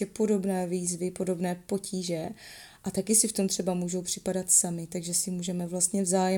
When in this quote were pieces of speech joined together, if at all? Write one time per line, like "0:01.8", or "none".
none